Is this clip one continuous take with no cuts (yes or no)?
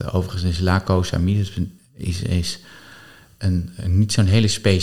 yes